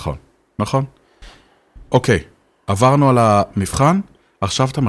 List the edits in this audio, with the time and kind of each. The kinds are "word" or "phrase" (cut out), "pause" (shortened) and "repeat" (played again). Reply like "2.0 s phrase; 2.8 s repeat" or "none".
none